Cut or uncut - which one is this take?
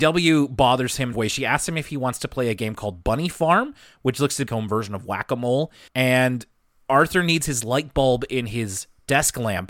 cut